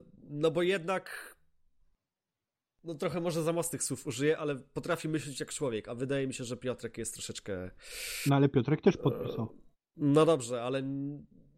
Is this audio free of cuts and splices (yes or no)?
no